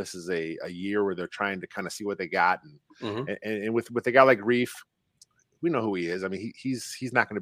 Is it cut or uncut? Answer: uncut